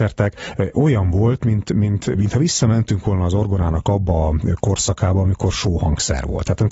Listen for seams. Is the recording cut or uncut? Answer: cut